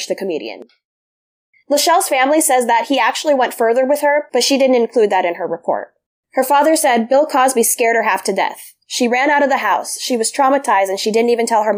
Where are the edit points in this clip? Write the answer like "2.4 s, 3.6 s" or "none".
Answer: 6.1 s